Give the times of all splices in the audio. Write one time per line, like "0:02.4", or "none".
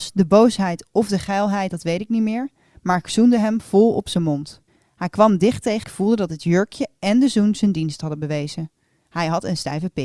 0:04.7
0:05.8